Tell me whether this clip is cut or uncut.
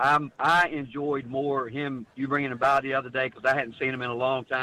uncut